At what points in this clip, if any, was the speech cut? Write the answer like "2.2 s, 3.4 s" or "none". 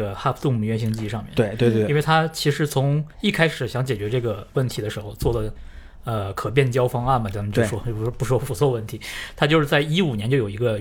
3.1 s